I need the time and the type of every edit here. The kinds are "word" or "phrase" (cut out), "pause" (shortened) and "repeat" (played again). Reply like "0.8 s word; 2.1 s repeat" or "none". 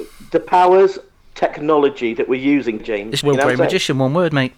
1.2 s word; 2.8 s word; 3.2 s word